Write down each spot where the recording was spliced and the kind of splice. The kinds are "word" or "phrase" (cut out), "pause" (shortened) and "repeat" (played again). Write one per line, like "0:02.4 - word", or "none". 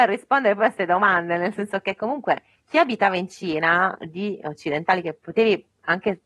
none